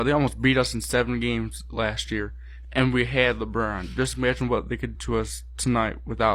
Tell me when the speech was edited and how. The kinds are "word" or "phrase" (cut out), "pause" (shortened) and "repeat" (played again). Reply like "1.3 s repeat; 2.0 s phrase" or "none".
4.9 s word